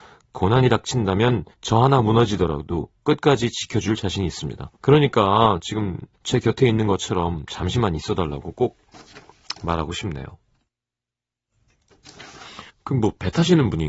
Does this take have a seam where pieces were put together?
yes; 4 cuts; at 1.5 s, 4.8 s, 6.1 s, 12.7 s

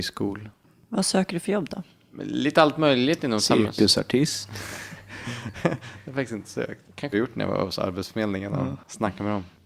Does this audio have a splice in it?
yes; 1 cut; at 7.1 s

